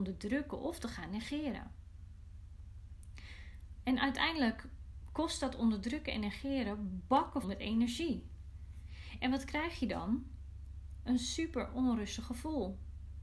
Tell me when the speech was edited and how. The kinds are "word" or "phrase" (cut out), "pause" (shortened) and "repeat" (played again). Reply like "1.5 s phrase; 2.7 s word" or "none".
7.4 s word